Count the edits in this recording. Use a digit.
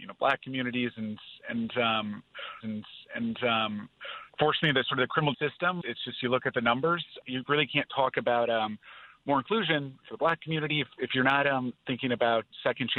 3